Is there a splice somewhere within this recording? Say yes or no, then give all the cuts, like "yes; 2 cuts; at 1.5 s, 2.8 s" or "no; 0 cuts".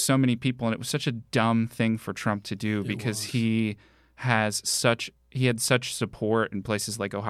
no; 0 cuts